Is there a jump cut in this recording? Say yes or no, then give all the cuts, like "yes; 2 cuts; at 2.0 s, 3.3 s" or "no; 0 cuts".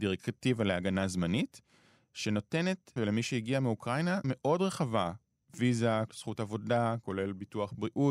yes; 4 cuts; at 3.0 s, 4.2 s, 5.4 s, 6.1 s